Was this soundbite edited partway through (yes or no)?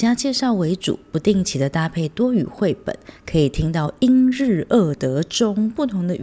no